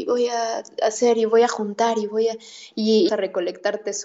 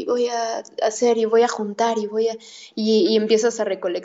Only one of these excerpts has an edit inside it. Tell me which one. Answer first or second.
first